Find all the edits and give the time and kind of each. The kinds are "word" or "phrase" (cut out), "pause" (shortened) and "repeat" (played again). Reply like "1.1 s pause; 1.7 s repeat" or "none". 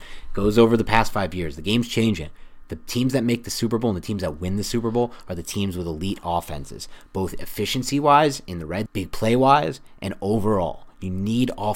8.9 s word